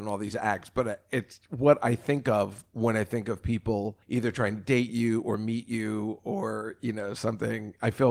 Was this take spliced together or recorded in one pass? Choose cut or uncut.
cut